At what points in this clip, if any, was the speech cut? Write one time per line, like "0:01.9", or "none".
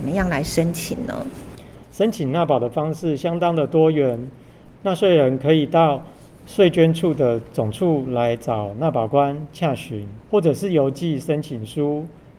0:10.2